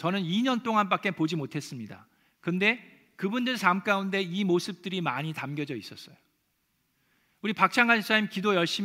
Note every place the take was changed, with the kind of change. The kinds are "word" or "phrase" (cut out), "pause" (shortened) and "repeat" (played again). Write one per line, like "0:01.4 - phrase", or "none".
none